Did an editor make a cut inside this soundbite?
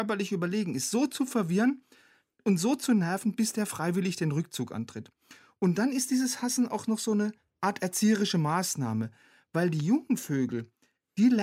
no; 0 cuts

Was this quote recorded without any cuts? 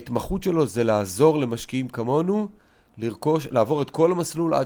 yes; 0 cuts

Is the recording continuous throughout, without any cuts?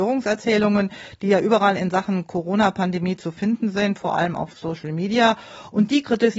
yes; 0 cuts

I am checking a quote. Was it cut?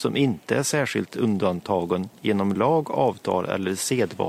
no; 0 cuts

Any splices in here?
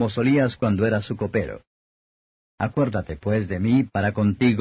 no; 0 cuts

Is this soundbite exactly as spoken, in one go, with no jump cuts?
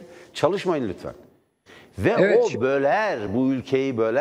yes; 0 cuts

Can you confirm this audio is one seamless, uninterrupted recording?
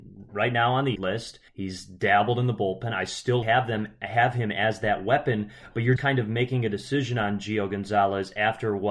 no; 4 cuts; at 1.0 s, 1.5 s, 3.4 s, 6.0 s

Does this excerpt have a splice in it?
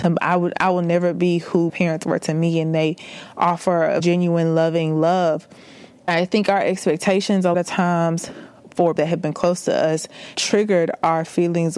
yes; 6 cuts; at 1.7 s, 4.0 s, 6.1 s, 7.5 s, 9.0 s, 10.3 s

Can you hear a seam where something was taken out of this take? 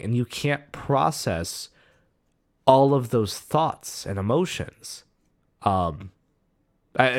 no; 0 cuts

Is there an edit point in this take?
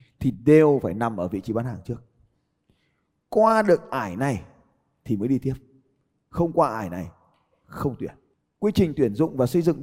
no; 0 cuts

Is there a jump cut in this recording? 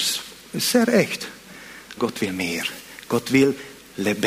yes; 1 cut; at 2.0 s

